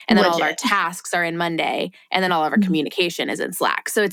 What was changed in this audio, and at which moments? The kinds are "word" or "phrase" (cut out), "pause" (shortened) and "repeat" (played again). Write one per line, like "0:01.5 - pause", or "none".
none